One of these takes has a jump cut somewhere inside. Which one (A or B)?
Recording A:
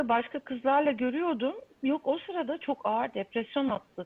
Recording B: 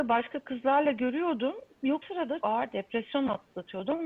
B